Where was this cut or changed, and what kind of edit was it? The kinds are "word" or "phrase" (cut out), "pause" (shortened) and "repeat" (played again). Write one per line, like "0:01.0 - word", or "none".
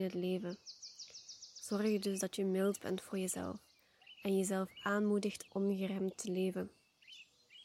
0:05.5 - word